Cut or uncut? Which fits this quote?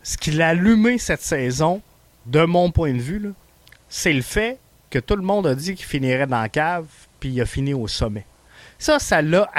uncut